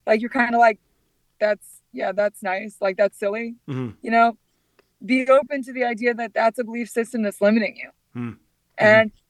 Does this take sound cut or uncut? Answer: uncut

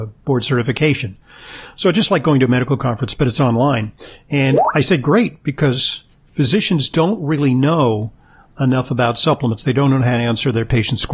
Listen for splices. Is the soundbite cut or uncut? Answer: uncut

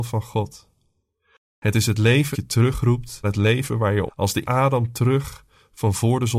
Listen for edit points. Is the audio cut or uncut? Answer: cut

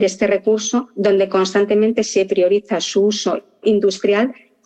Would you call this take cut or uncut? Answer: uncut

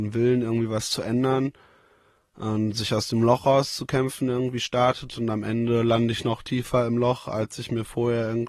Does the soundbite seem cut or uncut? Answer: uncut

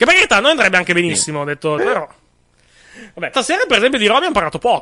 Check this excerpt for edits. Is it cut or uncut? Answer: cut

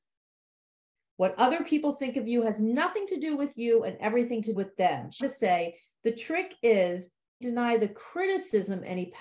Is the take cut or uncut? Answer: cut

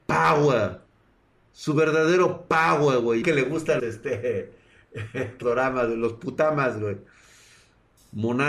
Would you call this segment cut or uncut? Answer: cut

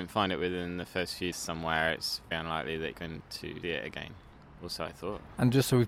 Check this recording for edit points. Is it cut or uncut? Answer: cut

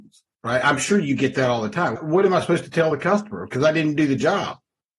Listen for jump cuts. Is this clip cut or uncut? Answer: uncut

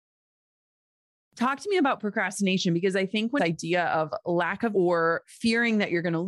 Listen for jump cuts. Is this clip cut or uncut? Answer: cut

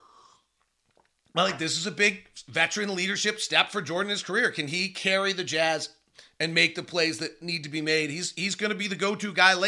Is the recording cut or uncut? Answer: uncut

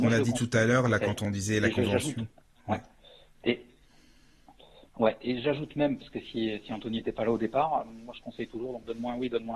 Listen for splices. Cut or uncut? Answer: uncut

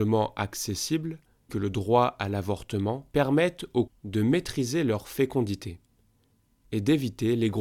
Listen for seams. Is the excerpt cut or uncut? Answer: cut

